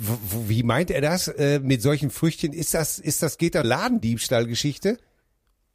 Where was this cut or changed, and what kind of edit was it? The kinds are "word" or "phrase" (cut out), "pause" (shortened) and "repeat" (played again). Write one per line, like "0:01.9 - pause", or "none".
0:03.6 - phrase

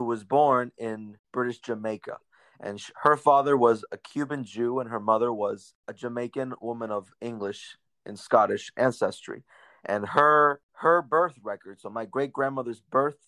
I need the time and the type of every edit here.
none

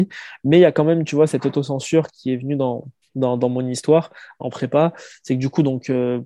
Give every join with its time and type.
0:03.0 - pause

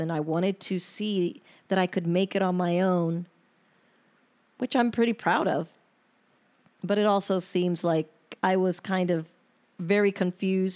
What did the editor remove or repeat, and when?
0:08.4 - pause

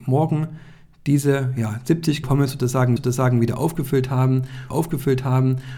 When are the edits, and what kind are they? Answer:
0:02.2 - word
0:03.0 - repeat
0:04.7 - repeat

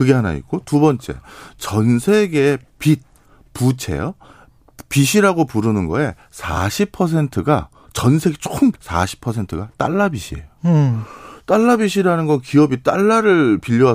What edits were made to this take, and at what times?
0:08.7 - word

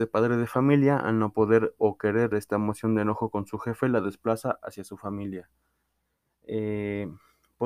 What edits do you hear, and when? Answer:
0:02.3 - word

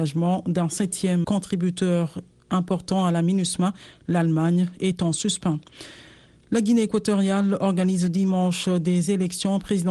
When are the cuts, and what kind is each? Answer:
0:01.2 - word

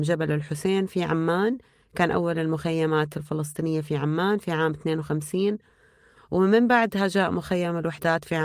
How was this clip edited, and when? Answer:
none

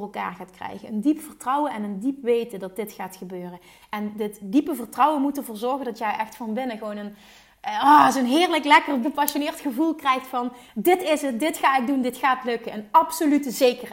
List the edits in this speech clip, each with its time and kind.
0:09.0 - word

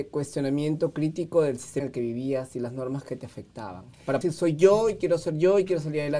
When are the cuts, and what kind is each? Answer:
0:01.8 - word
0:04.2 - word

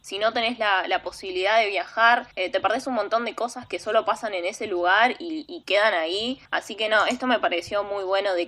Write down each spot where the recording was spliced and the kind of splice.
0:02.3 - pause
0:06.5 - pause

